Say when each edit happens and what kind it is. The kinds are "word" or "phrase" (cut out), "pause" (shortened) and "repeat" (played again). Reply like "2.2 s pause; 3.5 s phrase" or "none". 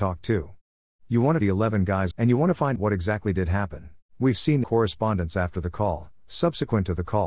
1.4 s phrase; 2.1 s phrase; 2.8 s word; 4.1 s pause; 4.6 s phrase